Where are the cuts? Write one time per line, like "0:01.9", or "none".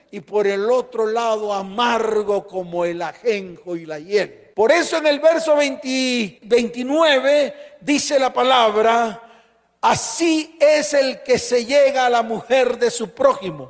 none